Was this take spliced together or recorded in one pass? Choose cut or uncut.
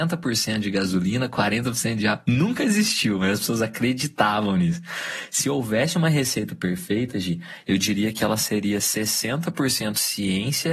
uncut